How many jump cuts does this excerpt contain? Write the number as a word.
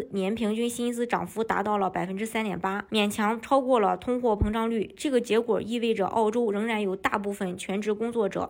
one